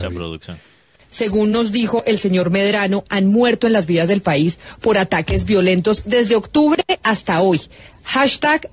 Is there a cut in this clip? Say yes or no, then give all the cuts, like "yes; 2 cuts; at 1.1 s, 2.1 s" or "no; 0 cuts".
no; 0 cuts